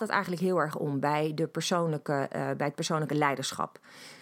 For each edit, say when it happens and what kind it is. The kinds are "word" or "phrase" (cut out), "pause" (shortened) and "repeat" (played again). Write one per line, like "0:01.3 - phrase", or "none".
none